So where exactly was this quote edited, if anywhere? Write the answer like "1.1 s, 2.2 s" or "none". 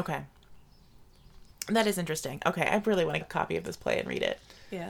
3.2 s